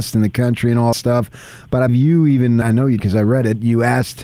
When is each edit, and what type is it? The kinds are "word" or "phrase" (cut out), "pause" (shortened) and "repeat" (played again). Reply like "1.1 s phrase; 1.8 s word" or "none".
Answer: 0.9 s word; 1.9 s word; 2.6 s word; 3.0 s word